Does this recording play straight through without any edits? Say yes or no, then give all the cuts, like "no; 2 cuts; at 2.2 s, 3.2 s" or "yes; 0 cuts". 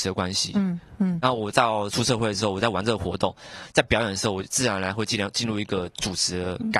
yes; 0 cuts